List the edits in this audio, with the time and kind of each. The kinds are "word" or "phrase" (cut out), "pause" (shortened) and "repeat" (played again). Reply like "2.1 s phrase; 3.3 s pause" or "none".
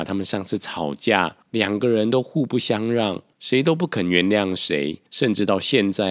1.4 s pause; 3.3 s pause; 5.1 s pause